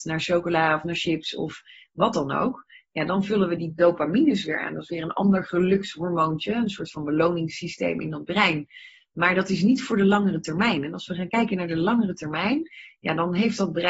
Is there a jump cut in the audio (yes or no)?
no